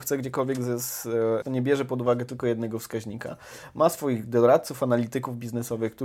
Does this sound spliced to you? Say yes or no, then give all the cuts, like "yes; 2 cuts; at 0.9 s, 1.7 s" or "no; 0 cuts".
yes; 1 cut; at 1.4 s